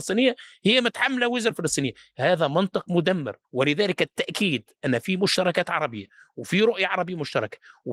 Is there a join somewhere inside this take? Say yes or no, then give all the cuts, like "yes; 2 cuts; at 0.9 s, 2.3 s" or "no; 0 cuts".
yes; 3 cuts; at 1.5 s, 3.4 s, 4.8 s